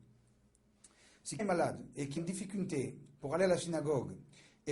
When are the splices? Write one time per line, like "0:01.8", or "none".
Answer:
0:01.4
0:02.2